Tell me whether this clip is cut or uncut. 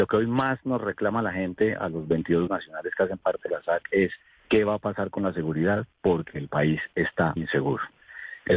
cut